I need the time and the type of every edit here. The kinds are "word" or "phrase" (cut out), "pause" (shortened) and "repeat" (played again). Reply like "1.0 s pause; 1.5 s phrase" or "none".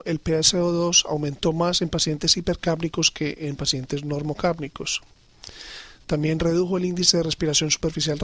none